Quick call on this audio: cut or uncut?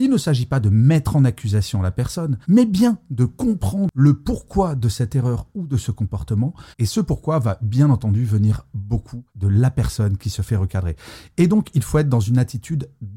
cut